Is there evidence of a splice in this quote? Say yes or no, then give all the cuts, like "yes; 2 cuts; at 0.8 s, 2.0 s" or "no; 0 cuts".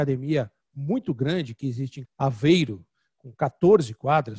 yes; 1 cut; at 2.0 s